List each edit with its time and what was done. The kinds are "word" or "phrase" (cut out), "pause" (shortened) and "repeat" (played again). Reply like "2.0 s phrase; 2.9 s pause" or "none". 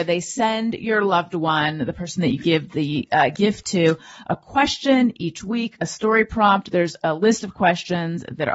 none